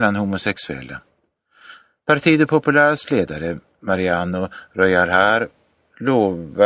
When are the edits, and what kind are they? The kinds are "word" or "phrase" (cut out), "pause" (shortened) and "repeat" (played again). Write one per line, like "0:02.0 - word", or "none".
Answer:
none

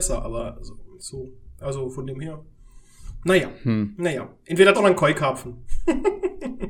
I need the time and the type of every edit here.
0:01.0 - word
0:04.7 - word

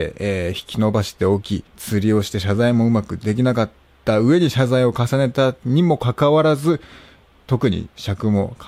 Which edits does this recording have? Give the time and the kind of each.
0:01.7 - pause

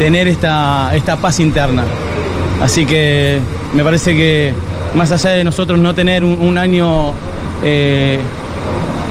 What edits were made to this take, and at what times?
none

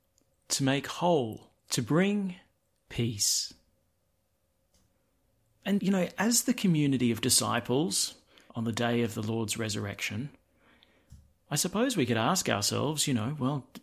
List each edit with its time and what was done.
0:01.6 - pause
0:05.8 - word
0:08.5 - word

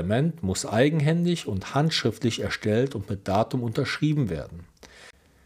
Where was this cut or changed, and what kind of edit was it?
none

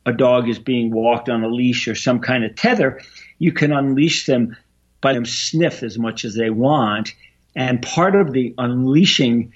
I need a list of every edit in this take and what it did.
0:05.1 - word

